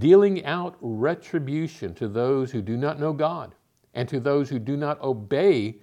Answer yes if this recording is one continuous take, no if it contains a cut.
yes